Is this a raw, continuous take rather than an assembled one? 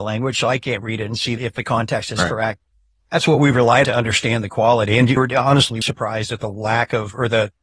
no; 4 cuts; at 1.4 s, 3.8 s, 5.2 s, 5.8 s

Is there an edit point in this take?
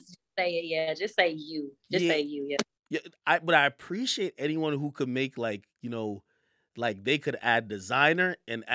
no; 0 cuts

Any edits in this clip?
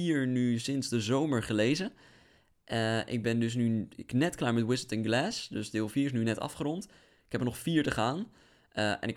no; 0 cuts

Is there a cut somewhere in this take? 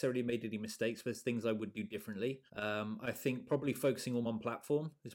yes; 2 cuts; at 2.5 s, 4.2 s

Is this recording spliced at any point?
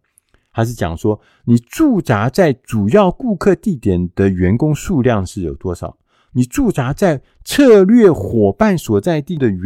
no; 0 cuts

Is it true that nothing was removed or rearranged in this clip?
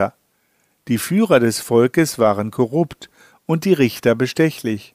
yes; 0 cuts

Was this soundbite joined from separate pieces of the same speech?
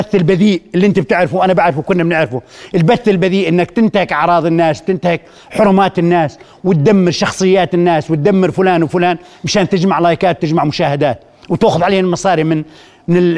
no; 0 cuts

